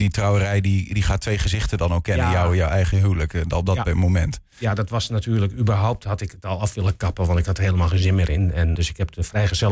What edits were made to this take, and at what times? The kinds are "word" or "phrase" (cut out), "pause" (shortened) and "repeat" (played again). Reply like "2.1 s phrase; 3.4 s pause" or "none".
8.7 s word